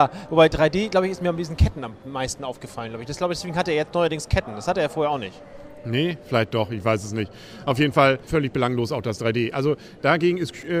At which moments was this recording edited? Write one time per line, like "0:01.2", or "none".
0:08.3